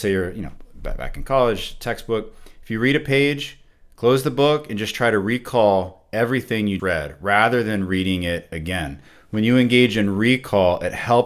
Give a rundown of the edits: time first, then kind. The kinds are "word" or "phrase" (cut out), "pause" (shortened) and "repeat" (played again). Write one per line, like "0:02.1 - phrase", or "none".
0:06.8 - word